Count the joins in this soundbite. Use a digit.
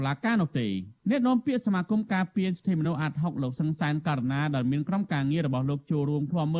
1